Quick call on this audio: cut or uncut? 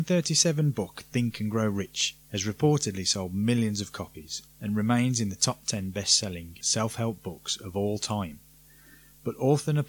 uncut